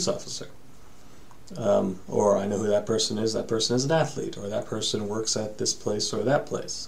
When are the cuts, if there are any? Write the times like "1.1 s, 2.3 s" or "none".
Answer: none